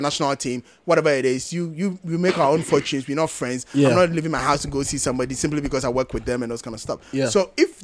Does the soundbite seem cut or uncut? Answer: uncut